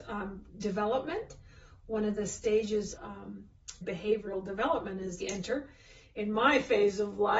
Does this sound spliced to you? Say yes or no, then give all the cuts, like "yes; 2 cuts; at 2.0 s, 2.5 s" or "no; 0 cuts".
yes; 3 cuts; at 2.9 s, 3.8 s, 5.2 s